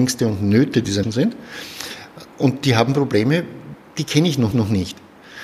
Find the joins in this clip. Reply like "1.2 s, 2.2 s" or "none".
1.0 s, 4.5 s